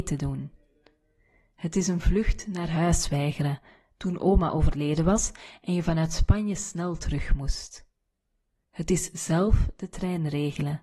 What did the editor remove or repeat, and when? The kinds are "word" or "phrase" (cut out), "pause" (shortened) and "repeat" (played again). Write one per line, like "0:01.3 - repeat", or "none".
none

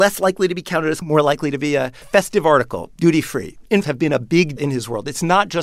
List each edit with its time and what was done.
0:01.0 - word
0:02.0 - word
0:03.8 - phrase
0:04.6 - word

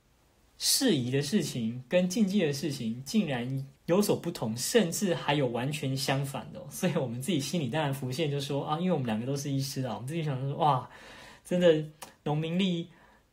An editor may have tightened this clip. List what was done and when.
0:03.8 - pause

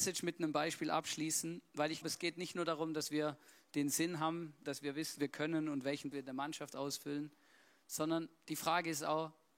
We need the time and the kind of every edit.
0:02.0 - word
0:04.6 - word
0:05.2 - word
0:06.1 - word

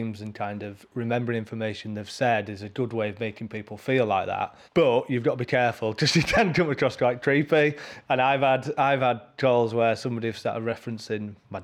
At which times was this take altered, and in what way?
0:04.7 - pause

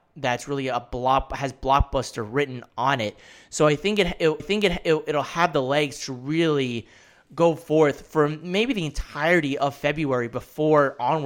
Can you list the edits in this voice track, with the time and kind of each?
0:04.4 - repeat

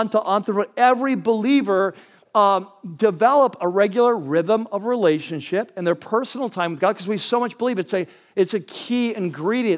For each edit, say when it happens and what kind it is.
none

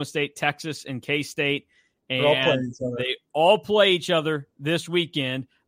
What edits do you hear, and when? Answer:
none

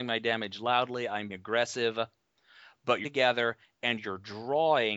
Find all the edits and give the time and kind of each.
0:01.3 - word
0:03.0 - word

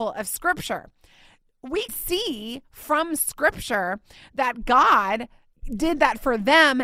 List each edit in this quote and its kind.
0:01.9 - word

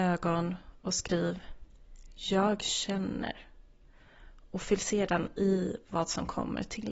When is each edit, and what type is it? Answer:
none

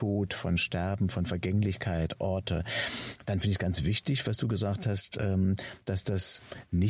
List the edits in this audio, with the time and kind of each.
none

